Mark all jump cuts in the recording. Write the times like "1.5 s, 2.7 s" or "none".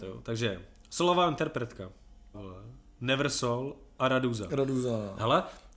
2.3 s